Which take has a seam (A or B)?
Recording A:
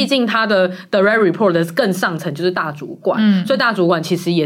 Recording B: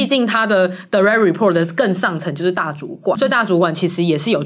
B